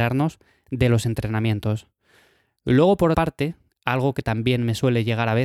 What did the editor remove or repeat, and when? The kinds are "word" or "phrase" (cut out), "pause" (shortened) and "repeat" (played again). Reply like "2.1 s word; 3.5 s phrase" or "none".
3.1 s word